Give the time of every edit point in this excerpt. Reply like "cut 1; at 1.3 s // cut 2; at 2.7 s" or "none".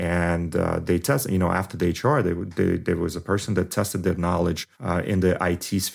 cut 1; at 4.7 s